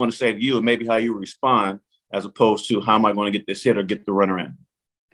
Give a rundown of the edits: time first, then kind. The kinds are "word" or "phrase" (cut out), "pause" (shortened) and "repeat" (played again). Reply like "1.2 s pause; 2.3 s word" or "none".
none

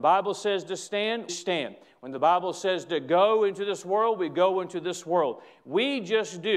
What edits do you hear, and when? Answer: 1.3 s word

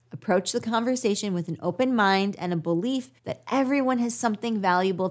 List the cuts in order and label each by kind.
3.2 s pause

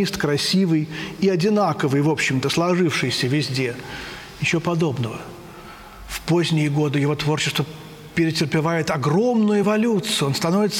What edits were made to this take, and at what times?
none

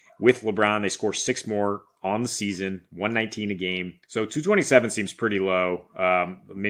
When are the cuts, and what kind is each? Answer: 4.0 s pause

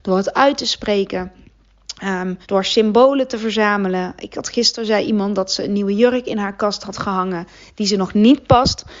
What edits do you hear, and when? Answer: 2.4 s pause

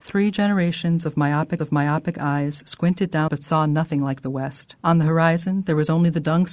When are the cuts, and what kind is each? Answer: 1.6 s repeat; 3.3 s phrase; 4.8 s pause

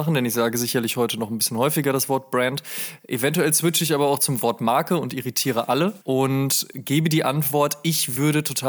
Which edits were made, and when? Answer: 6.0 s pause

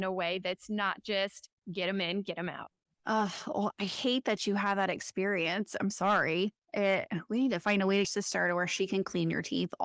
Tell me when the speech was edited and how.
1.6 s pause; 2.9 s pause; 5.9 s word; 6.6 s pause; 8.0 s phrase

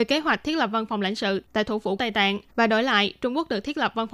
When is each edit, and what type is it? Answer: 2.0 s word; 2.5 s pause

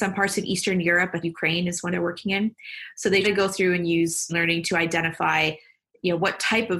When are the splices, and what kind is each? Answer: 1.2 s word; 1.9 s word; 3.2 s word; 4.3 s word

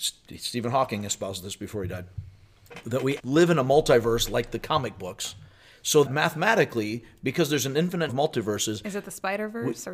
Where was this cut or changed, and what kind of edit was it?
3.2 s word; 6.1 s word; 8.1 s word

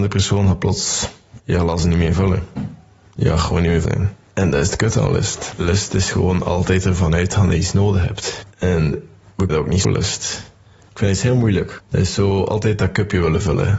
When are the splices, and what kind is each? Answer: 3.8 s word; 9.5 s word; 9.8 s word

